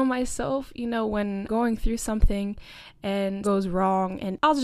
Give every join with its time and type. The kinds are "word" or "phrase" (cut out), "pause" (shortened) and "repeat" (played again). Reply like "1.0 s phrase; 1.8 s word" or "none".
1.5 s word; 3.4 s word